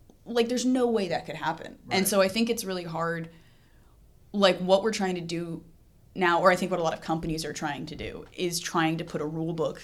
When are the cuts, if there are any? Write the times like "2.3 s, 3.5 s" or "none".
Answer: none